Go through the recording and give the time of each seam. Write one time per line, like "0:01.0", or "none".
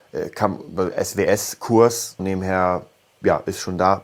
0:02.2